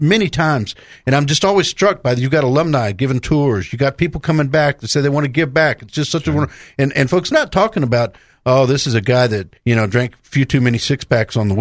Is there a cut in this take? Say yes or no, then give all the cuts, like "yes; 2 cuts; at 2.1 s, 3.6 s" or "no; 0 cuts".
yes; 2 cuts; at 7.3 s, 9.6 s